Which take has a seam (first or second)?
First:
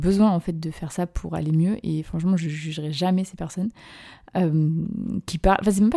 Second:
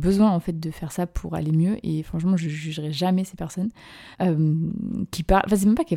second